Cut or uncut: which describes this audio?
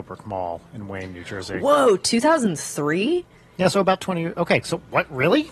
uncut